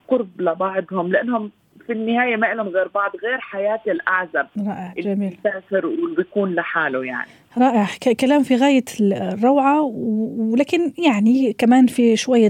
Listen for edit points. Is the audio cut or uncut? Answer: uncut